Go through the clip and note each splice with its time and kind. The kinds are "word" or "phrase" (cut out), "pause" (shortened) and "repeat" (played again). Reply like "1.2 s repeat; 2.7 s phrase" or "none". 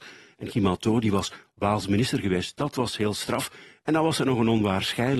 none